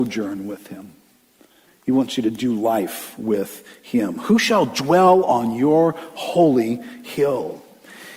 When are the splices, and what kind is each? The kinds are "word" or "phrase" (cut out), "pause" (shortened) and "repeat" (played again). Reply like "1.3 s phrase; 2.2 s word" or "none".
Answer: none

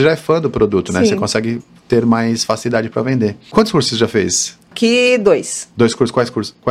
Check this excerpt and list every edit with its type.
none

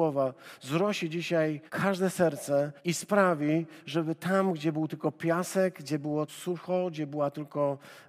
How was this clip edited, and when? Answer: 1.7 s pause; 2.8 s pause; 6.3 s word

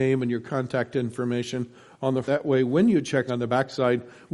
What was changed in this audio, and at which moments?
2.2 s word; 3.3 s word

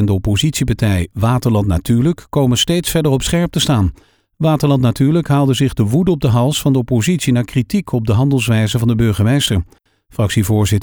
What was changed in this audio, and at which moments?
none

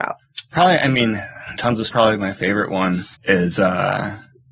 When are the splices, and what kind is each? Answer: 1.6 s word; 1.9 s phrase; 3.1 s pause

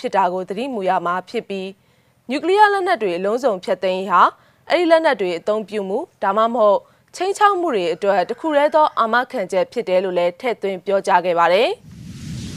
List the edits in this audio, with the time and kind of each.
none

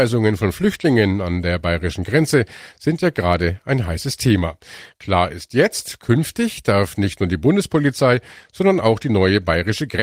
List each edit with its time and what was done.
none

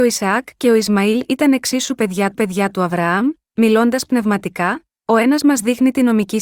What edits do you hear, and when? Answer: 2.3 s repeat

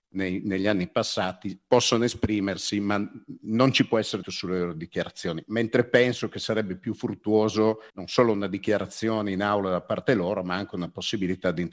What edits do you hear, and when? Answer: 4.2 s word; 7.9 s pause

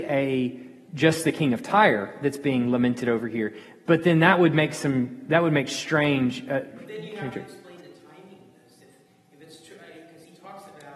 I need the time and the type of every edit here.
none

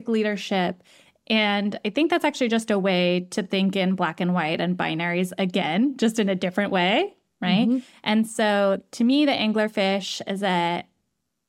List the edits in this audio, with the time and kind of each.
none

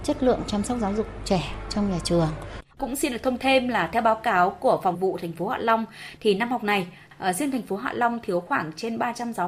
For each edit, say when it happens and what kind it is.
2.7 s pause; 3.4 s word; 4.9 s word

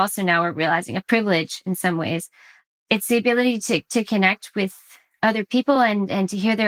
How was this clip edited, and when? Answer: none

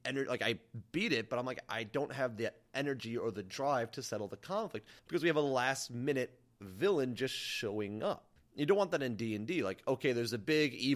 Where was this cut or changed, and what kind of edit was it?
5.0 s pause; 8.4 s pause

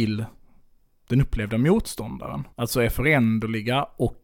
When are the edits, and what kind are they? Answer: 2.5 s pause

